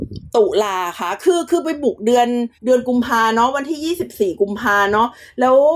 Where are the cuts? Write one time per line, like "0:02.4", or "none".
0:02.5